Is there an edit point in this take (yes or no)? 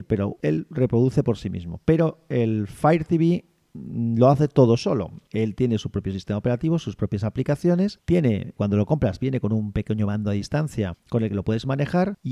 yes